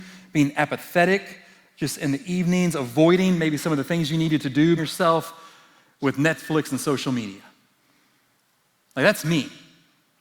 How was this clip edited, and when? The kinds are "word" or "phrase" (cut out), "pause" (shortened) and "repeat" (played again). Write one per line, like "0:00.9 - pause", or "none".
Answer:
0:04.8 - phrase

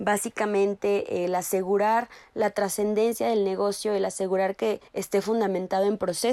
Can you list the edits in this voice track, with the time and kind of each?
0:04.9 - pause

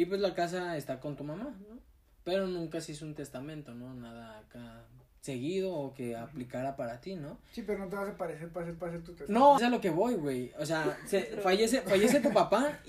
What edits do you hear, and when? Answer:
0:05.1 - pause
0:08.8 - repeat
0:09.6 - phrase

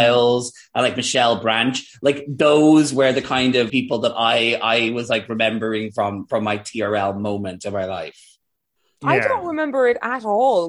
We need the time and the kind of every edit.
0:03.7 - word

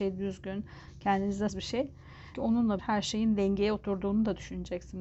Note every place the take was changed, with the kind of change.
0:01.5 - word
0:02.3 - word
0:02.8 - word

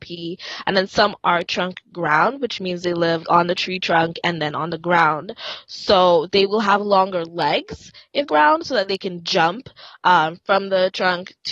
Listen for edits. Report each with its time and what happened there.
0:03.2 - word
0:08.3 - phrase

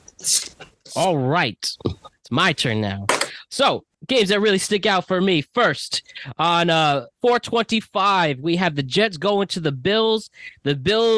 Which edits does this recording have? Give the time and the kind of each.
0:03.9 - pause
0:07.1 - pause

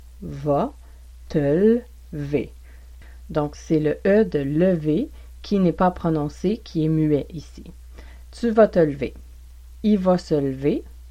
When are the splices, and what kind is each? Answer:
none

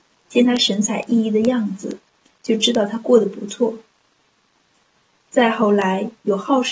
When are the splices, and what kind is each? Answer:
none

